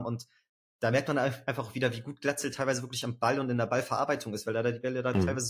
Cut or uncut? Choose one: uncut